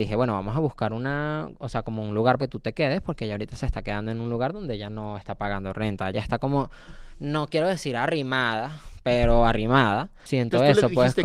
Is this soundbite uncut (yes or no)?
no